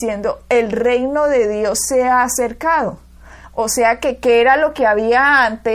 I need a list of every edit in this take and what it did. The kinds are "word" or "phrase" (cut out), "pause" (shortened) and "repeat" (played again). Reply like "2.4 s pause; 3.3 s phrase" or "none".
none